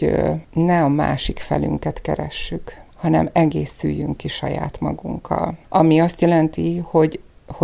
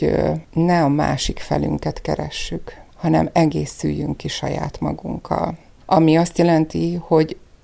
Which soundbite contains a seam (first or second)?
first